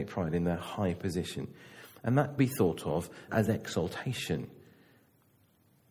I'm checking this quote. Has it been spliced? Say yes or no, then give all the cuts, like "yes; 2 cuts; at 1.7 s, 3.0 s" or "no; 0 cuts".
yes; 2 cuts; at 2.4 s, 3.3 s